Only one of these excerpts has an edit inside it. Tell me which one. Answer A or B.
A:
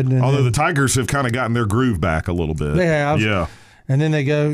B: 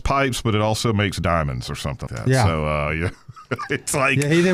B